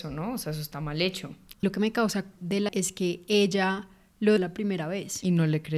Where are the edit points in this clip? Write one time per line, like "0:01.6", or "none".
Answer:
0:01.6
0:02.4
0:02.7
0:04.4